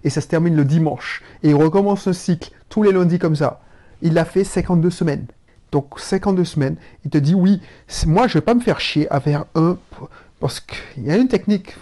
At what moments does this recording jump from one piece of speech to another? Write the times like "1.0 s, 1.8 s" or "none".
none